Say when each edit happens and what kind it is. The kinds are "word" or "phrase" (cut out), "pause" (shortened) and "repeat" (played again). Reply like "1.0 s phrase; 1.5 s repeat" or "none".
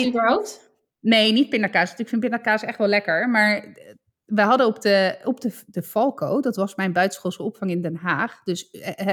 none